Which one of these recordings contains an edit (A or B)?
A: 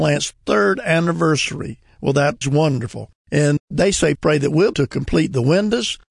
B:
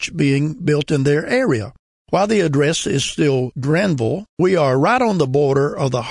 A